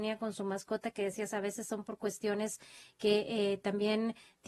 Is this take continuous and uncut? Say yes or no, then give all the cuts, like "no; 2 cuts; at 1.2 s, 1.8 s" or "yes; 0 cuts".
yes; 0 cuts